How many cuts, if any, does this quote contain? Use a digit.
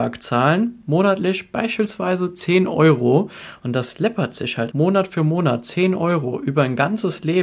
1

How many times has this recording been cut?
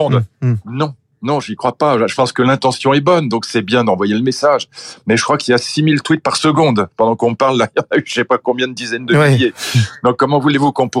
0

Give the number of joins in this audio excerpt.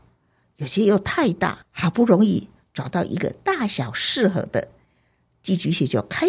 1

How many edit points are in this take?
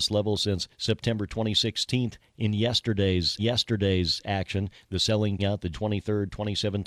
3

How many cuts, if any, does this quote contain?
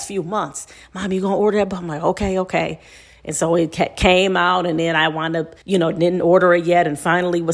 1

